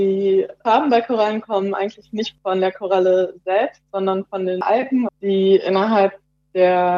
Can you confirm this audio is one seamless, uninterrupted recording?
no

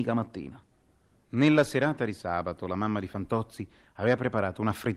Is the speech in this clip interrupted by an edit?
no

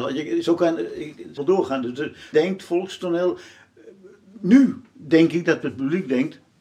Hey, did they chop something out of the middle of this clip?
yes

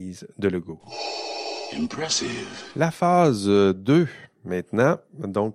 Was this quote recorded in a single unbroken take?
yes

